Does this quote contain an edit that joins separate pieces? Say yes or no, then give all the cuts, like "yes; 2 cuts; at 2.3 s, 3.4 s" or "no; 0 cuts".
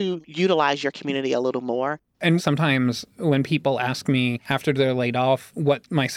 no; 0 cuts